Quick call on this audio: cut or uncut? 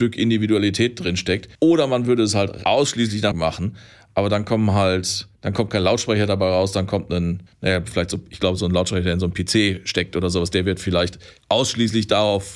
cut